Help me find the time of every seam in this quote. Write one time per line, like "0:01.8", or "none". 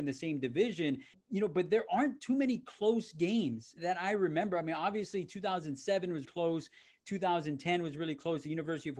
0:03.8
0:06.2